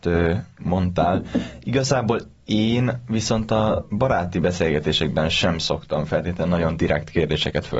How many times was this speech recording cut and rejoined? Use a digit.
0